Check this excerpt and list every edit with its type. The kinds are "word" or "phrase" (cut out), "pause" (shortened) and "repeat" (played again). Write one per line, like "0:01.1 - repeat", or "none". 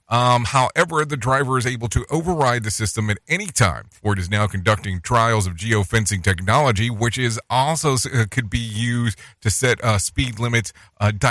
0:04.0 - pause